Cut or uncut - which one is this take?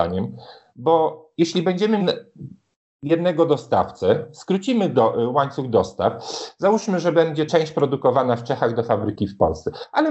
cut